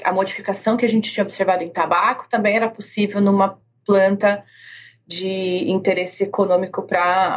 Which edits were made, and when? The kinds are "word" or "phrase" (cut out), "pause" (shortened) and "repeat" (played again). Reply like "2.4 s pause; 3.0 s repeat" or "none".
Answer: none